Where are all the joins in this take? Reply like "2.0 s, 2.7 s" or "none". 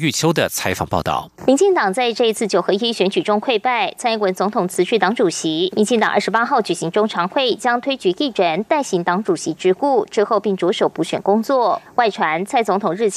1.4 s